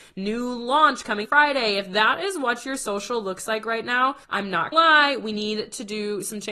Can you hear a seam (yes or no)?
yes